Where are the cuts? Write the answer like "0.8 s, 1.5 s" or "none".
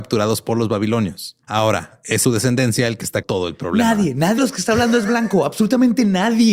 1.4 s, 2.2 s, 3.2 s, 4.4 s